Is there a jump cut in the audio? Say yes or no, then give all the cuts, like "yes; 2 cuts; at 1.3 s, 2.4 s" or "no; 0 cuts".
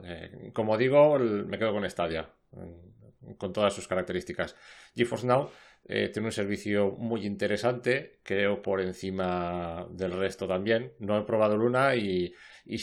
yes; 1 cut; at 8.6 s